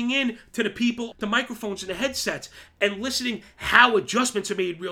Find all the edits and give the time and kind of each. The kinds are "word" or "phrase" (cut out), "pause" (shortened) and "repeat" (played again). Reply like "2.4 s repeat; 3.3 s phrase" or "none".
1.1 s word

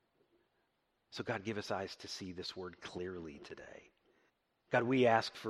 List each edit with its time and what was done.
4.3 s pause

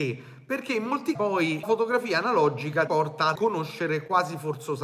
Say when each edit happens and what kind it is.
1.2 s word; 1.6 s word; 2.9 s word; 3.4 s word

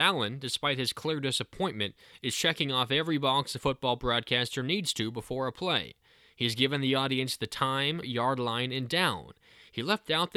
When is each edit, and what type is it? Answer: 8.0 s word

